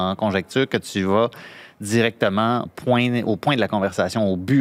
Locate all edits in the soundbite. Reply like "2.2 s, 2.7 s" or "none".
2.7 s